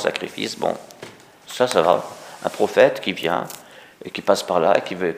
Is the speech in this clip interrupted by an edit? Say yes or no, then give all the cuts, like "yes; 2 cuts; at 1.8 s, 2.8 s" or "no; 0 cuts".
no; 0 cuts